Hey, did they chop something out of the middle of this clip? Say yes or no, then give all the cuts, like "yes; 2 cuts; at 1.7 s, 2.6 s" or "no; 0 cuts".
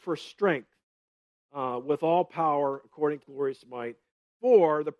yes; 1 cut; at 3.2 s